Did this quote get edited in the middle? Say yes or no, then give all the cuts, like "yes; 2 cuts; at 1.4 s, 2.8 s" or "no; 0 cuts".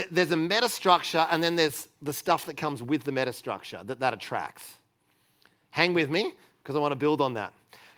no; 0 cuts